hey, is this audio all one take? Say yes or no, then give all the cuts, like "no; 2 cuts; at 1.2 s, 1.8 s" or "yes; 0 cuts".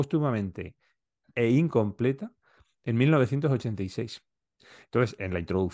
yes; 0 cuts